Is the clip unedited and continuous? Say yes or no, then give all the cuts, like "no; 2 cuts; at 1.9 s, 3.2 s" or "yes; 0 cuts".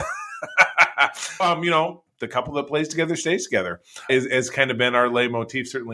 no; 3 cuts; at 1.4 s, 2.1 s, 4.1 s